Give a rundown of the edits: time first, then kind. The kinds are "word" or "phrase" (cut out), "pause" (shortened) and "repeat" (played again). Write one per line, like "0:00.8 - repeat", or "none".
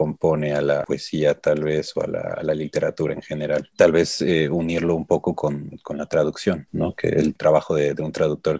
none